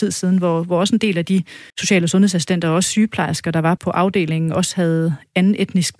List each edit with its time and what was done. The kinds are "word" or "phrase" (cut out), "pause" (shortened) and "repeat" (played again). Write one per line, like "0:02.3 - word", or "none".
0:01.7 - pause
0:03.8 - word